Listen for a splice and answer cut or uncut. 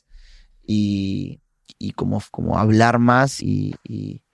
cut